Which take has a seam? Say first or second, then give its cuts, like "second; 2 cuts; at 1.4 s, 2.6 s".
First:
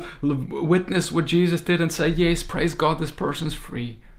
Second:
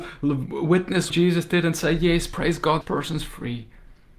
second; 2 cuts; at 1.1 s, 2.8 s